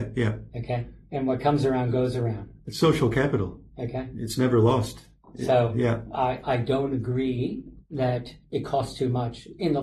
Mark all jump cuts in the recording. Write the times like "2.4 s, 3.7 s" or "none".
none